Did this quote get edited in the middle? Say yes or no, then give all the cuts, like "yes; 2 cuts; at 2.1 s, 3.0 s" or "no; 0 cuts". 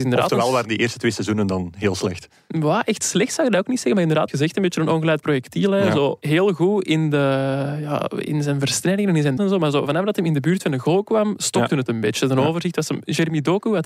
yes; 2 cuts; at 4.3 s, 9.4 s